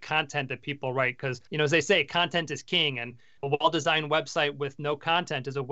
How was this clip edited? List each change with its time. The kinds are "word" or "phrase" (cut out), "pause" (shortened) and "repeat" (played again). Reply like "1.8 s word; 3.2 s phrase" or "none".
1.5 s pause; 3.4 s word